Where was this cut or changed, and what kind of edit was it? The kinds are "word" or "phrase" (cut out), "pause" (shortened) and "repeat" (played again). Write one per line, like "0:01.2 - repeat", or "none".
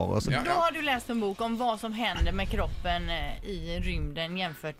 none